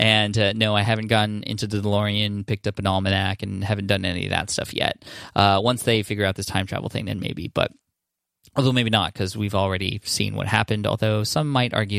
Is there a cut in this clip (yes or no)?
no